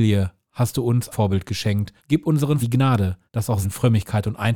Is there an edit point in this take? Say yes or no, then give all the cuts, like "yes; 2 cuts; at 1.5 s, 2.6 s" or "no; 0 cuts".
yes; 5 cuts; at 1.1 s, 2.0 s, 2.6 s, 3.3 s, 3.6 s